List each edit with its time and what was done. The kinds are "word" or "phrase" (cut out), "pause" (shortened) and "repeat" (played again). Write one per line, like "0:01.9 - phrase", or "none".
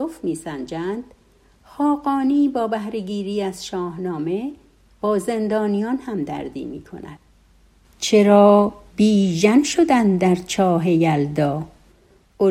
none